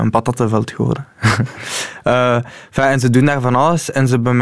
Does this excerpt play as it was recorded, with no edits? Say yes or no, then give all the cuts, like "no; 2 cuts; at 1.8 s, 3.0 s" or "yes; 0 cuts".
yes; 0 cuts